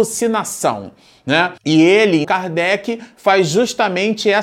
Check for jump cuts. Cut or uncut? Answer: cut